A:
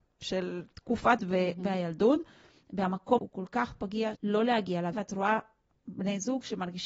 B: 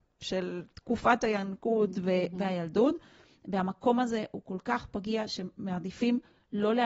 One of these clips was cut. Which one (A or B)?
A